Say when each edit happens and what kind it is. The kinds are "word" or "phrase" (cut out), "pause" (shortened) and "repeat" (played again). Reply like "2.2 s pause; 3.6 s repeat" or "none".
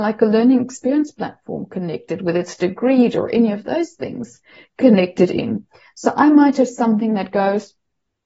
none

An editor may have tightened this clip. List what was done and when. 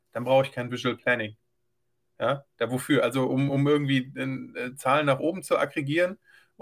none

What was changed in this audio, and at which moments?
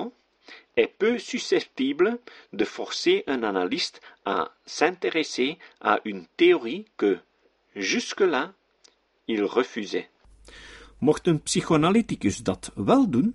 none

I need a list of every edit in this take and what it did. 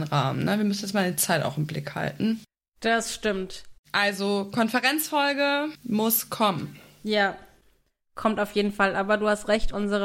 none

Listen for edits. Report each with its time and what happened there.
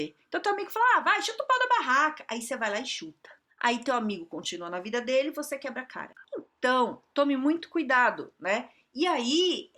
3.5 s pause

